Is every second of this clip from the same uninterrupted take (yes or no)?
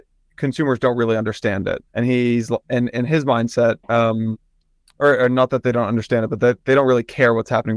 no